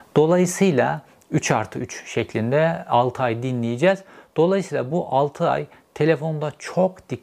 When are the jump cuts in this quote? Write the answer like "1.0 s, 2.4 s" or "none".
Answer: none